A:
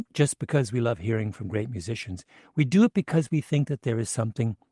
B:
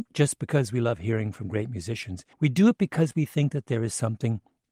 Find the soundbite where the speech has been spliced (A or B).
B